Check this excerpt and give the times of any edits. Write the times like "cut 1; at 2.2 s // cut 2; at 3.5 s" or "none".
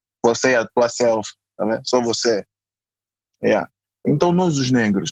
none